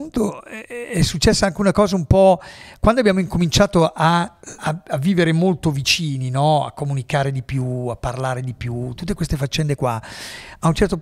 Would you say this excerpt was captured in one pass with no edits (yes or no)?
no